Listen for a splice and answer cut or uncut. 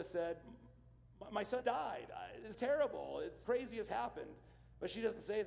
cut